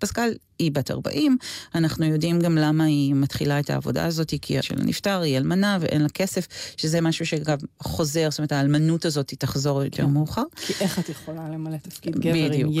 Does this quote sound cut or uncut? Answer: cut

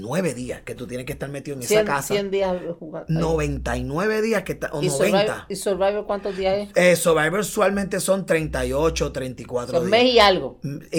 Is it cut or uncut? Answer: uncut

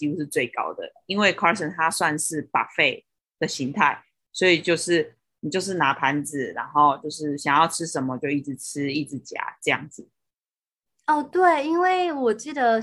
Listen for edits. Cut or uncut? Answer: uncut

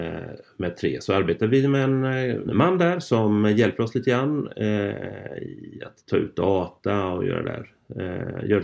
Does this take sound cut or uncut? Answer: uncut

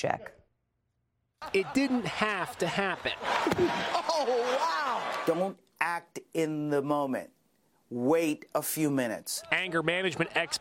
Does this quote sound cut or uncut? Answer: uncut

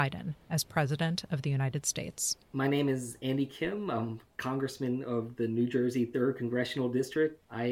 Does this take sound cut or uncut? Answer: cut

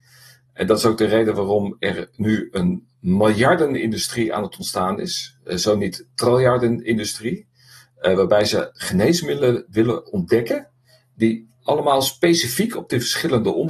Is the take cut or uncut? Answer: uncut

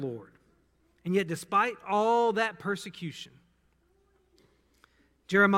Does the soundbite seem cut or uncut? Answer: uncut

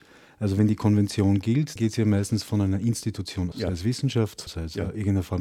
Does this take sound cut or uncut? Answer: cut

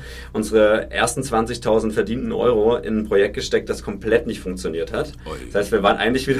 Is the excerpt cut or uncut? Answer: uncut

